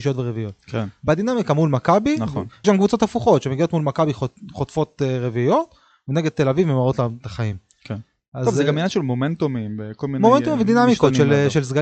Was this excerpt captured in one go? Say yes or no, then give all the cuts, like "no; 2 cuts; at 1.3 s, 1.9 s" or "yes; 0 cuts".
no; 1 cut; at 2.6 s